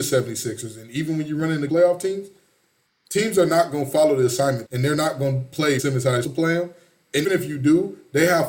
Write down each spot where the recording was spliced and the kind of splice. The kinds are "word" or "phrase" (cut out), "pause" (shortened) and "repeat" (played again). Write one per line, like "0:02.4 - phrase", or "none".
0:01.7 - word
0:04.6 - word
0:05.8 - word
0:06.2 - word
0:07.2 - word